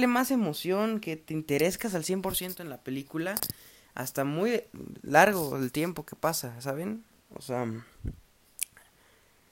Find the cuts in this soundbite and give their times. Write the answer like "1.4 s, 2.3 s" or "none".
none

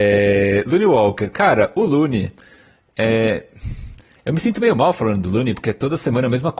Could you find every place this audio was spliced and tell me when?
none

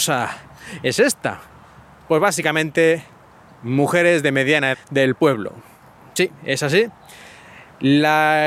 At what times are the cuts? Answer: 4.7 s

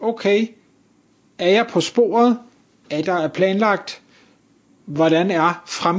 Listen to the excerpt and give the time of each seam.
3.0 s

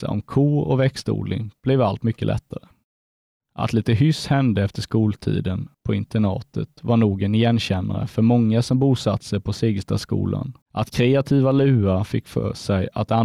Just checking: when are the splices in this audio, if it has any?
5.7 s, 10.6 s

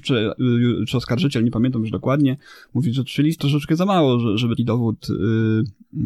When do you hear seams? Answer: 3.4 s, 4.6 s

